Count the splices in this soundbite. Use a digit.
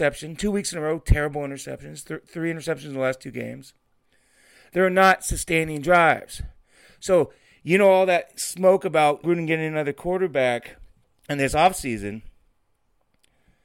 2